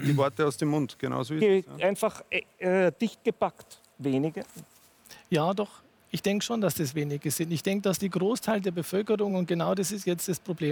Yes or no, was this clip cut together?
no